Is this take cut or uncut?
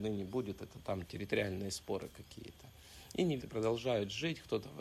cut